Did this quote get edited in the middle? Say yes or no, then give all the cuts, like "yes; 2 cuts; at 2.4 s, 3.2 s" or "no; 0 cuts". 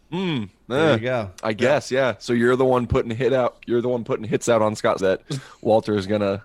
yes; 2 cuts; at 1.4 s, 5.0 s